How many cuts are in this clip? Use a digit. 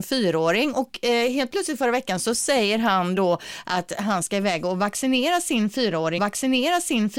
1